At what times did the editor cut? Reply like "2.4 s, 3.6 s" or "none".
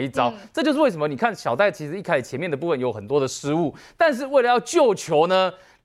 none